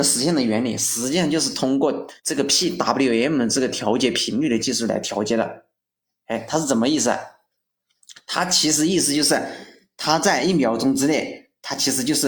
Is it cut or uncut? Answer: cut